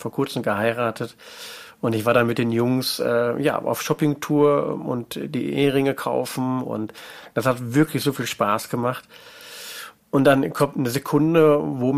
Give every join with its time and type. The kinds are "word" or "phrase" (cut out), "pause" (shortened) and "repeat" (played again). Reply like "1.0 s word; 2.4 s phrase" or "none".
10.0 s pause